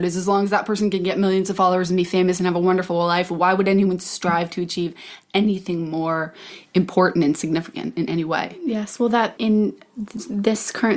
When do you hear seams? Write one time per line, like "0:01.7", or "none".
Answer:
0:09.4